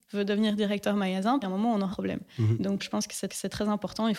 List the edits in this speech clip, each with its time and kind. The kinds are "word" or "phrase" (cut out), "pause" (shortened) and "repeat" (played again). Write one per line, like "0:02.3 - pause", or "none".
0:01.4 - phrase
0:01.9 - word
0:02.8 - word
0:03.3 - repeat